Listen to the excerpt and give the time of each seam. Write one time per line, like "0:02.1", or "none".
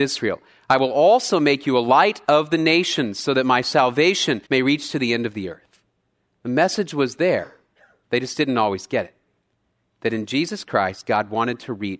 0:04.4
0:06.1